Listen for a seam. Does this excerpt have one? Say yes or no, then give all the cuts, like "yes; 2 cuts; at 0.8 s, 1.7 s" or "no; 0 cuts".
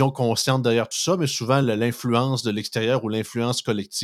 no; 0 cuts